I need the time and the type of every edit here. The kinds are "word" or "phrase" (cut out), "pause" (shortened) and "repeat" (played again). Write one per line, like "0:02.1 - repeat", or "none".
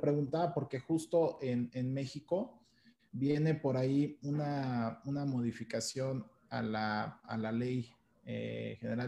none